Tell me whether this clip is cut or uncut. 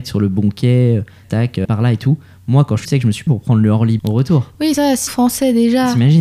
cut